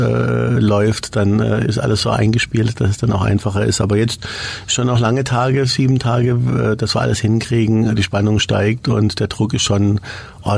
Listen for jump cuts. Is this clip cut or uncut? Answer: uncut